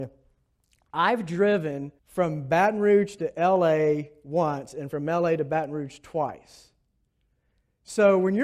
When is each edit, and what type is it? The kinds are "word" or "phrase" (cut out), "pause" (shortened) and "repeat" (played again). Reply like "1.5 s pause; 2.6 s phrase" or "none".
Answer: 2.0 s pause